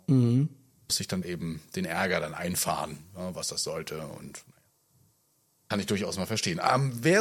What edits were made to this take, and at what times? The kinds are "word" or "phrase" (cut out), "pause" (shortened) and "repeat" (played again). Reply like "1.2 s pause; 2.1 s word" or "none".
1.2 s phrase